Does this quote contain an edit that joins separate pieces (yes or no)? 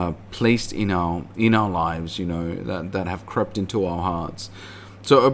no